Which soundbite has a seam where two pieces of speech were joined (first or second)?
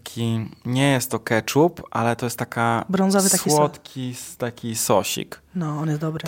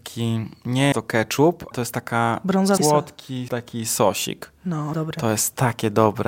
second